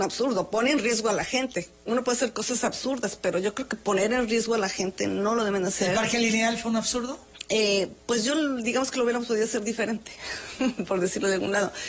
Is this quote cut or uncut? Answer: uncut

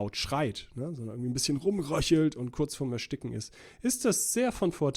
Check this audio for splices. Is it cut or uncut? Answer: uncut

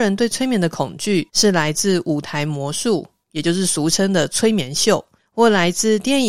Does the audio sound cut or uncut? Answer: cut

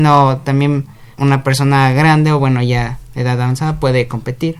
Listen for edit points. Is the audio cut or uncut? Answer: cut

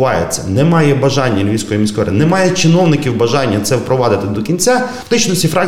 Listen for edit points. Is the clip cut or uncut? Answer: uncut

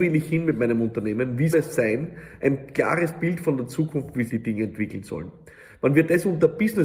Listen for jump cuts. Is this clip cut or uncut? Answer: cut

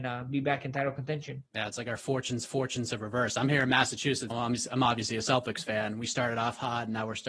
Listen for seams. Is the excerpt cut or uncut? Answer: cut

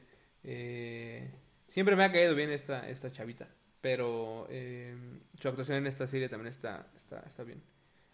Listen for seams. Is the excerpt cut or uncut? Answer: uncut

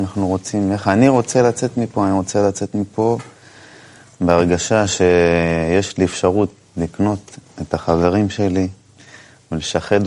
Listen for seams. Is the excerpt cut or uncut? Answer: uncut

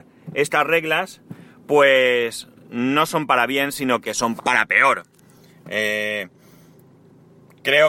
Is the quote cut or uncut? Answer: cut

